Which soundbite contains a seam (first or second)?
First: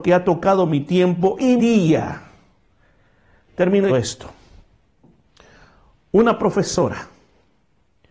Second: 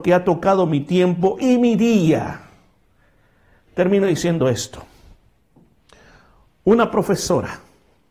first